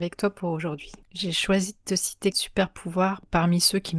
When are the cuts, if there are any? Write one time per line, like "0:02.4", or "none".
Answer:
0:01.0
0:02.3